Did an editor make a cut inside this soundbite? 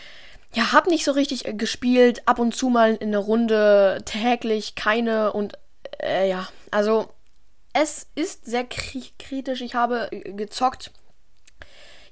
yes; 1 cut; at 10.1 s

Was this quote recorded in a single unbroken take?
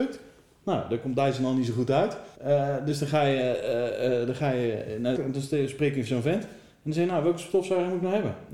no; 2 cuts; at 2.3 s, 5.1 s

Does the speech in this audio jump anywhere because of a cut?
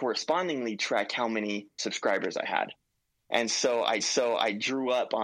yes; 2 cuts; at 1.7 s, 4.0 s

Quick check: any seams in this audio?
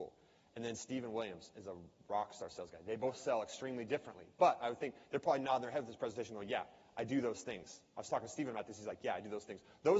no; 0 cuts

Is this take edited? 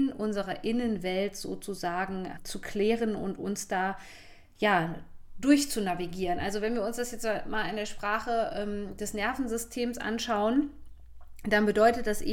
yes; 1 cut; at 2.4 s

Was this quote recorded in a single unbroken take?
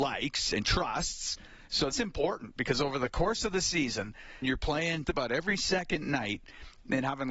no; 3 cuts; at 1.9 s, 4.4 s, 5.0 s

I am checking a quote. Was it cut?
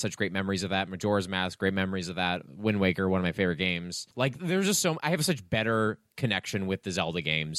yes; 1 cut; at 4.1 s

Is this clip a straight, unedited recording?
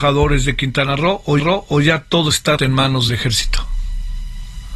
no; 3 cuts; at 1.4 s, 2.6 s, 3.1 s

